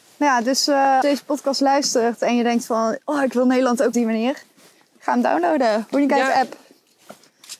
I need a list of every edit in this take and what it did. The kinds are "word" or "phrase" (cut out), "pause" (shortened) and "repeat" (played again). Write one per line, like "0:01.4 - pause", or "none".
0:01.0 - word
0:03.9 - phrase